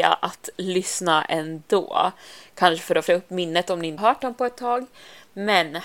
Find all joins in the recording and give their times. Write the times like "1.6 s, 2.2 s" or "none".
3.1 s, 4.0 s